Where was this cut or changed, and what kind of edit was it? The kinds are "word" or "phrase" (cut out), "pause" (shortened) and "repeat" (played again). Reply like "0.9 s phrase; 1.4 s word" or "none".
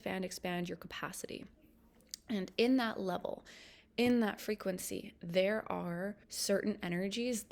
6.2 s pause